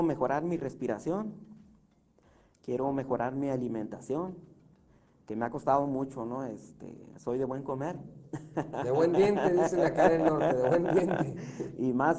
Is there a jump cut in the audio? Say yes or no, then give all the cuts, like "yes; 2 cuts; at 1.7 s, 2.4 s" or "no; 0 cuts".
no; 0 cuts